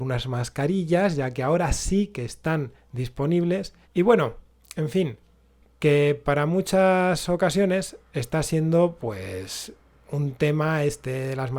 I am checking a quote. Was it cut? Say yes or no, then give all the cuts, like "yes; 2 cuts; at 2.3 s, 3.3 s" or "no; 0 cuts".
yes; 1 cut; at 3.8 s